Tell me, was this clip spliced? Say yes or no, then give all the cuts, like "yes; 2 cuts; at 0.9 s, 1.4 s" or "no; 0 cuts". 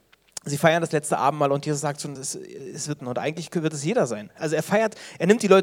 yes; 2 cuts; at 2.2 s, 3.0 s